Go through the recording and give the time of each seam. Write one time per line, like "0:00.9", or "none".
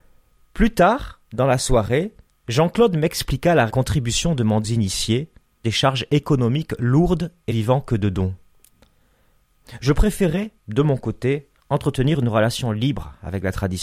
0:01.3
0:02.3
0:03.7
0:04.6
0:05.6
0:07.5
0:10.6
0:11.6